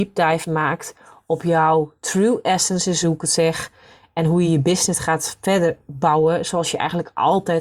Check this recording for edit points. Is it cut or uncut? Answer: uncut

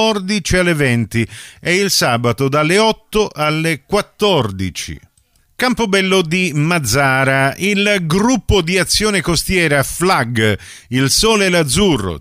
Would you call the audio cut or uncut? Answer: uncut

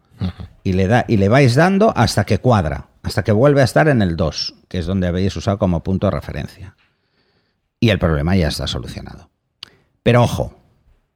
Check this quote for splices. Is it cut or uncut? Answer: uncut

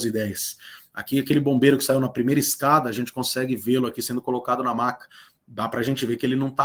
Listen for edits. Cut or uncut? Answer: uncut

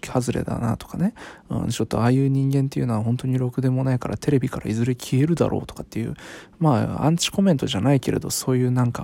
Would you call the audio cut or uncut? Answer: uncut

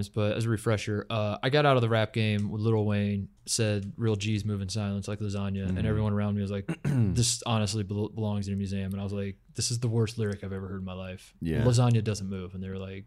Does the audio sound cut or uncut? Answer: cut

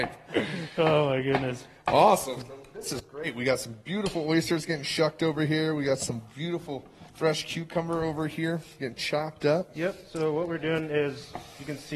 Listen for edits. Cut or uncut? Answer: cut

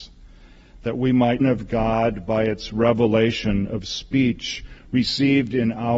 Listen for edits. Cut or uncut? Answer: cut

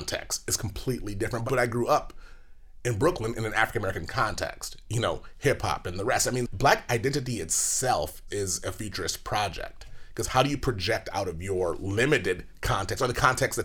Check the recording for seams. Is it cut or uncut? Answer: cut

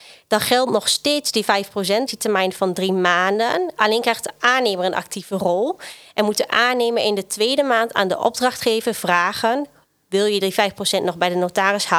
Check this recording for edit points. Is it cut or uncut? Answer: cut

